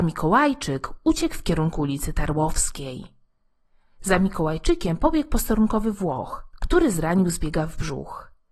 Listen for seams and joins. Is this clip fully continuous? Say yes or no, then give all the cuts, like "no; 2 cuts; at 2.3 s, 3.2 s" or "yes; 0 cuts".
yes; 0 cuts